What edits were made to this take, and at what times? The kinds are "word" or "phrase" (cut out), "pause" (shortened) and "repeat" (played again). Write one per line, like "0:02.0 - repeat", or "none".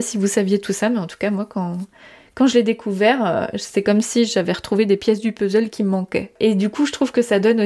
none